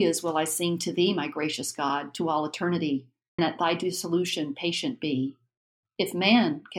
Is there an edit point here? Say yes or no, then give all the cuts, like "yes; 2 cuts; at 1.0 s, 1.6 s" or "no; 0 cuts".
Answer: yes; 1 cut; at 3.4 s